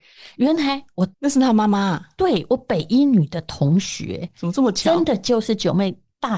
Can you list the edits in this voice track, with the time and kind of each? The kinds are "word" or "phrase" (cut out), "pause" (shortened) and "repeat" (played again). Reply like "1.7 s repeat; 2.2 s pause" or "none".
1.1 s pause